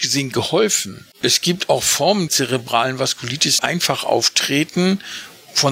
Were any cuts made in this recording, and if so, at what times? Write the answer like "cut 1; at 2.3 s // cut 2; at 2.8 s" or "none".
cut 1; at 1.1 s // cut 2; at 2.3 s // cut 3; at 3.6 s